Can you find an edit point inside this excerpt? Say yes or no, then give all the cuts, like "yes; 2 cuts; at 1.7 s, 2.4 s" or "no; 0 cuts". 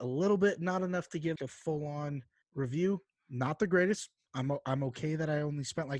yes; 2 cuts; at 1.4 s, 2.4 s